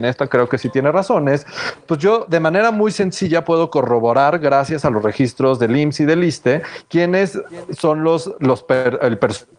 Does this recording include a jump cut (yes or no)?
no